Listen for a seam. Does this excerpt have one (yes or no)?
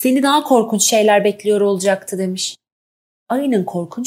no